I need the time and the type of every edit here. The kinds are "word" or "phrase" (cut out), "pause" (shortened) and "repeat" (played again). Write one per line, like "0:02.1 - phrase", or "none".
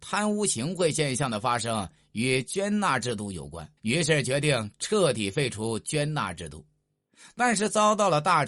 0:03.8 - pause